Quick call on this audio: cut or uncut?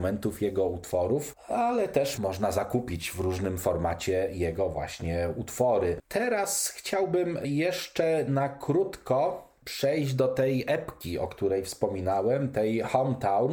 uncut